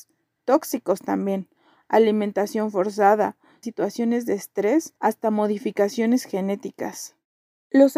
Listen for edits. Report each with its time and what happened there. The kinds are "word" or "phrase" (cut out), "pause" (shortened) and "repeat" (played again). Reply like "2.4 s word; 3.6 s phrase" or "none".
3.6 s phrase; 5.0 s pause